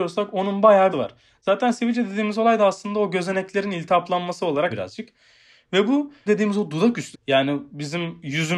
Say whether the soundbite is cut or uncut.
cut